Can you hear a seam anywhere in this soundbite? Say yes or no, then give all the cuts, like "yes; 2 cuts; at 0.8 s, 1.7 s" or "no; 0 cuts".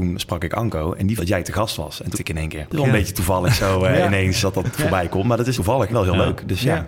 yes; 5 cuts; at 1.2 s, 2.1 s, 4.4 s, 5.5 s, 5.9 s